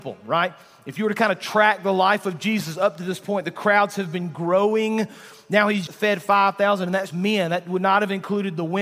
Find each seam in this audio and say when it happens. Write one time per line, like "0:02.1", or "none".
0:05.9
0:07.1